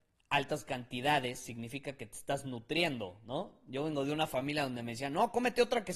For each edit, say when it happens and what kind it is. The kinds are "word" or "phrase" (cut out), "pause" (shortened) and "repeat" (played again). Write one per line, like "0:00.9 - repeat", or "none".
none